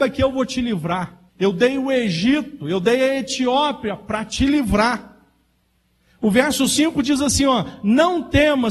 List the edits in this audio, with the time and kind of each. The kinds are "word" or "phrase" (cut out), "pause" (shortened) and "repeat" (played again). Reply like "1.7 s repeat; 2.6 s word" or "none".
1.3 s pause